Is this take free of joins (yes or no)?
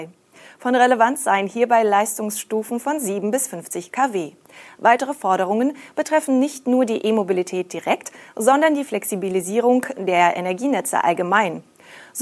yes